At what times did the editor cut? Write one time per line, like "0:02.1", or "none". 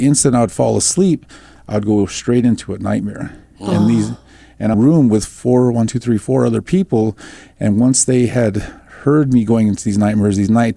0:04.7

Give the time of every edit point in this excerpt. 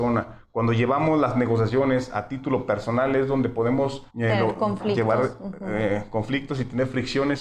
0:04.1

